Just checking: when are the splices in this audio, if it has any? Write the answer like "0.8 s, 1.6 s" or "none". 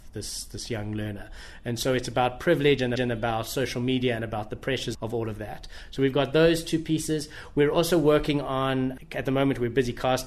3.0 s, 4.9 s